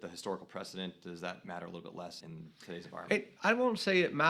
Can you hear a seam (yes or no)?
yes